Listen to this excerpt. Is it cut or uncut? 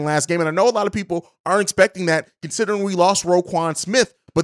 uncut